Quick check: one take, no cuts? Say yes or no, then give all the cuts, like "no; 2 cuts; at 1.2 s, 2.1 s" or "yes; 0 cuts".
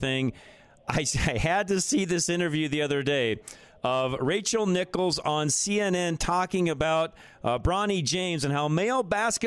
yes; 0 cuts